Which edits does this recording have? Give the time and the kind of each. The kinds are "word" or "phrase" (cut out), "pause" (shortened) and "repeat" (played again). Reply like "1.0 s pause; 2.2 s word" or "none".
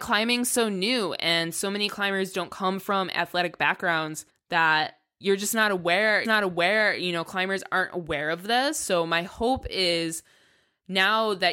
4.3 s pause; 6.2 s repeat